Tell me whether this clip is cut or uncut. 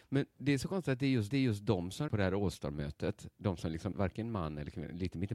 cut